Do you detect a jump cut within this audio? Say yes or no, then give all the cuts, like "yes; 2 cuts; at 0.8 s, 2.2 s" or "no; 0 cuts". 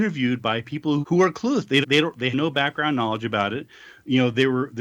yes; 3 cuts; at 1.0 s, 1.8 s, 2.3 s